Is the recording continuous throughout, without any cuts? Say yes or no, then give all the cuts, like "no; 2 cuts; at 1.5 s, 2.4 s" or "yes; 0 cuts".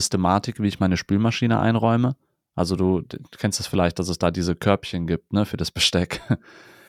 yes; 0 cuts